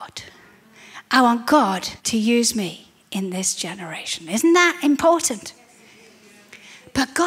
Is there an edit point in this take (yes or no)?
yes